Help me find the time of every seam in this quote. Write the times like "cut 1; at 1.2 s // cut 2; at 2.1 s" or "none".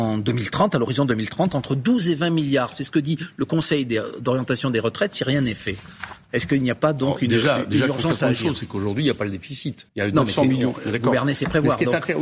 cut 1; at 9.9 s